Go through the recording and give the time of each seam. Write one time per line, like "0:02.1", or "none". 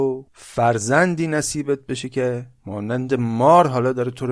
none